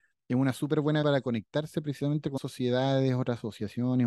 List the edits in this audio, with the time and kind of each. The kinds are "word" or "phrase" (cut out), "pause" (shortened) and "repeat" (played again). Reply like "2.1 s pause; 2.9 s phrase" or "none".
1.0 s word; 2.4 s word